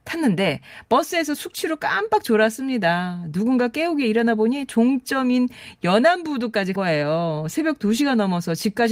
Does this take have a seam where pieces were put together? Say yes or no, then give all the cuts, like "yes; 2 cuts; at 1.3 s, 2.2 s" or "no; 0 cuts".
yes; 1 cut; at 6.8 s